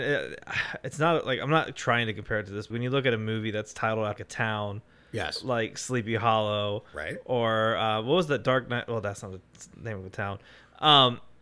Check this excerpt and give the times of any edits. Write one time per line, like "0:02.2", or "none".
0:02.7
0:04.2